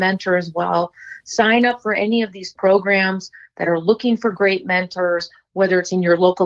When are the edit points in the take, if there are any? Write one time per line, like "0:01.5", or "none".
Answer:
none